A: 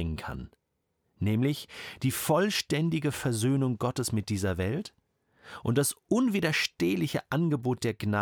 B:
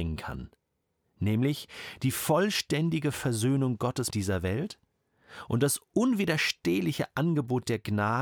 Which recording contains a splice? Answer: B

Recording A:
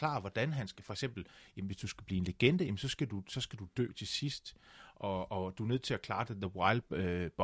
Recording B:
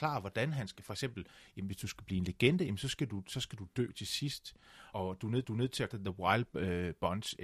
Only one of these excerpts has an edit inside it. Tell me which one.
B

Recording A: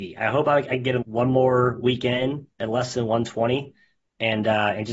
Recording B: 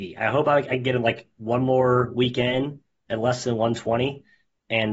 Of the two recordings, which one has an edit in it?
A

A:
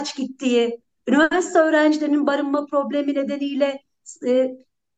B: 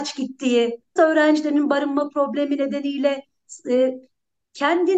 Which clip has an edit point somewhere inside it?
B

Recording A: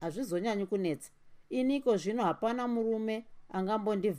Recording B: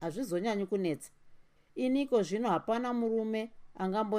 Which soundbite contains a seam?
A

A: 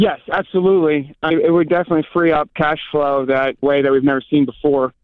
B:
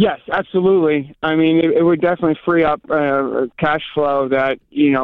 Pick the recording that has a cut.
A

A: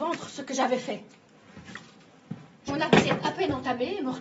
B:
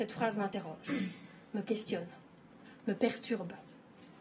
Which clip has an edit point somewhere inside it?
A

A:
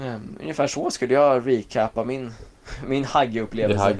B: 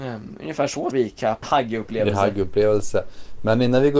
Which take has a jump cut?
B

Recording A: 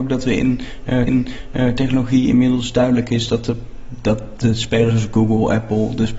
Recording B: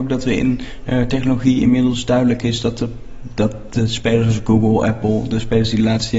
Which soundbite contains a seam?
A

